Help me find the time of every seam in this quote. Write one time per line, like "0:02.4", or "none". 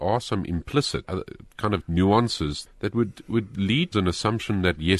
0:01.0
0:01.8
0:02.7
0:03.2
0:03.9